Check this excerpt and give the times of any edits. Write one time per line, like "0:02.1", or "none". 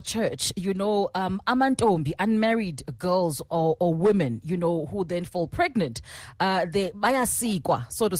none

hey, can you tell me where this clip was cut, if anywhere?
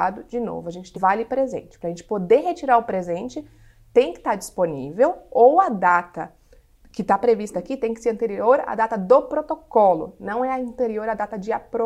0:00.9

